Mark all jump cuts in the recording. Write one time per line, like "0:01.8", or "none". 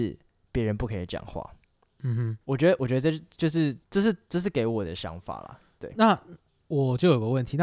0:02.4
0:03.8